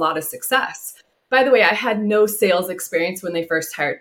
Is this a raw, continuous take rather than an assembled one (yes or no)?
yes